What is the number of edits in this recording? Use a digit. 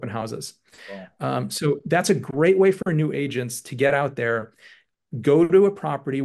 0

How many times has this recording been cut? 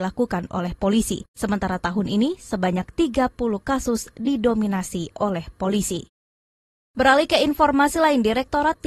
0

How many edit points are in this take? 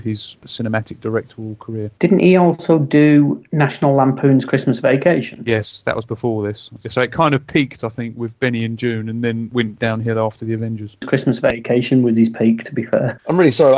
1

